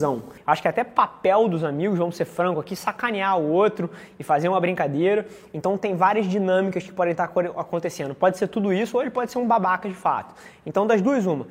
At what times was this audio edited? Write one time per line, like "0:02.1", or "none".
none